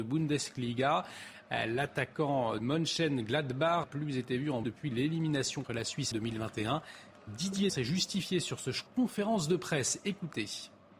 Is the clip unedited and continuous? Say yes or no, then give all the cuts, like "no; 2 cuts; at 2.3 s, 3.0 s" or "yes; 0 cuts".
no; 7 cuts; at 2.6 s, 3.8 s, 4.6 s, 5.6 s, 6.1 s, 7.7 s, 8.9 s